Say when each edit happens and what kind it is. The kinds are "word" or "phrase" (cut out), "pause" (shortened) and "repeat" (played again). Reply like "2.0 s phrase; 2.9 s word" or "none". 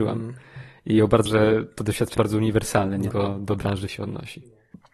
1.3 s word; 2.2 s word; 3.1 s word; 3.9 s word